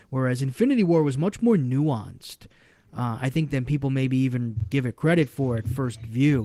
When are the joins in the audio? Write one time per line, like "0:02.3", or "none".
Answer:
none